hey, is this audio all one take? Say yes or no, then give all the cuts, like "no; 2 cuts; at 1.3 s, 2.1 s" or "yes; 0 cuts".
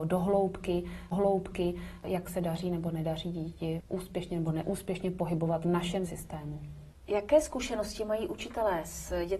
no; 2 cuts; at 1.1 s, 6.0 s